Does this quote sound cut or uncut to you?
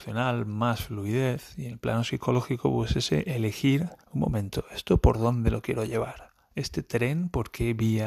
cut